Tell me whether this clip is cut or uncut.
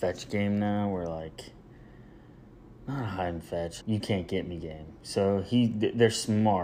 cut